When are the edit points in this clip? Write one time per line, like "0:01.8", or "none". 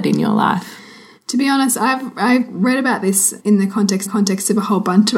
0:03.4
0:04.1